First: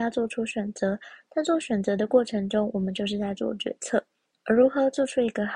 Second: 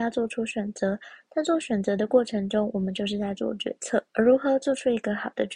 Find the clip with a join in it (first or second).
second